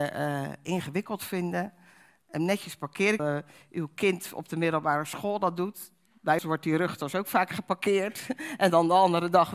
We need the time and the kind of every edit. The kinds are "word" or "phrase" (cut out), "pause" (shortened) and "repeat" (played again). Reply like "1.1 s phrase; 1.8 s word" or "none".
3.2 s phrase; 6.4 s word

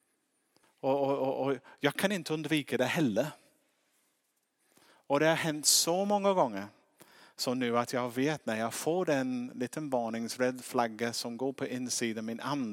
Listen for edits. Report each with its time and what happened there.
none

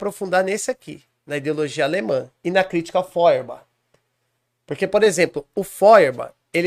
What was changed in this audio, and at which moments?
none

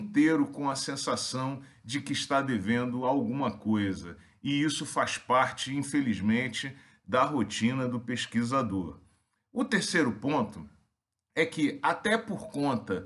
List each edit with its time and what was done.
none

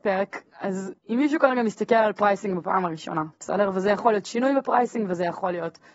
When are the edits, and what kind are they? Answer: 1.0 s pause

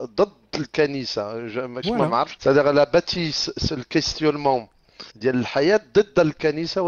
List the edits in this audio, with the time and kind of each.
1.8 s word; 2.4 s phrase; 5.1 s pause

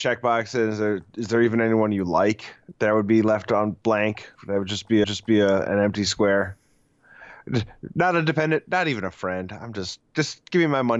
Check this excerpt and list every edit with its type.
4.4 s pause; 5.0 s repeat; 10.1 s pause

